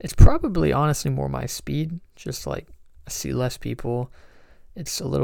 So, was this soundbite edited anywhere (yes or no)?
no